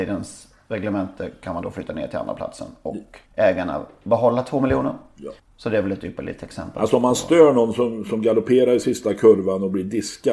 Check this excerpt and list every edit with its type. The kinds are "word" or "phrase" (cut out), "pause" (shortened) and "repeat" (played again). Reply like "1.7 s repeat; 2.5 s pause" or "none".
3.3 s pause; 5.4 s pause